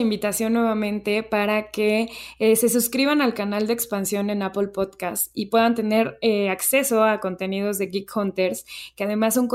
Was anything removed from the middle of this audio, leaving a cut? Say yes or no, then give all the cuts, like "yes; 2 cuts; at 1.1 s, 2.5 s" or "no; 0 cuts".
no; 0 cuts